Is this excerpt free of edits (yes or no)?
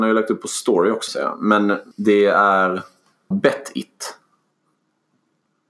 no